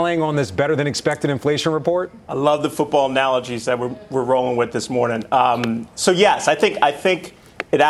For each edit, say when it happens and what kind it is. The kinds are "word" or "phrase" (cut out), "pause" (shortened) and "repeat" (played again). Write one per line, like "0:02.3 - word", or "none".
0:02.2 - pause